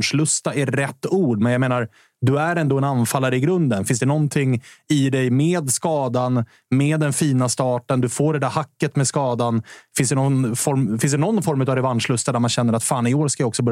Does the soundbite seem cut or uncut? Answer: uncut